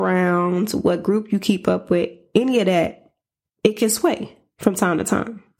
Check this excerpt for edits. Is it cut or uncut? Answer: uncut